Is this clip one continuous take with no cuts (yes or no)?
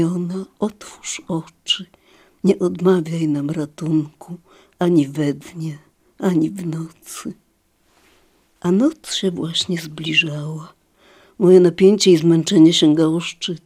yes